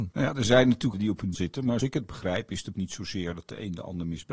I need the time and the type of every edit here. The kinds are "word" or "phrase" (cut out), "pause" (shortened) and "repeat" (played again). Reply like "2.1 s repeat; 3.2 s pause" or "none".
0.9 s word; 1.3 s word; 1.8 s word; 2.7 s word